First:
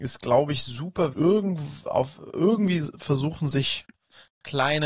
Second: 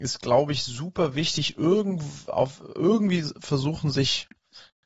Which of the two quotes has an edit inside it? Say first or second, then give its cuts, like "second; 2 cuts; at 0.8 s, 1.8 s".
first; 1 cut; at 1.1 s